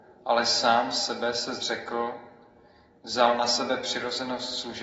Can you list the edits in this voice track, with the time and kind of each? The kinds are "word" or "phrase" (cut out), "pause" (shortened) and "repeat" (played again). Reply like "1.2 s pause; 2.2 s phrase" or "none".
none

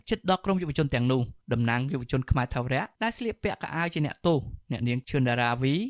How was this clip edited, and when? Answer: 1.4 s pause

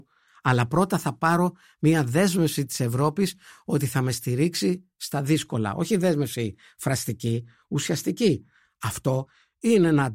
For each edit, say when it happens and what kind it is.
none

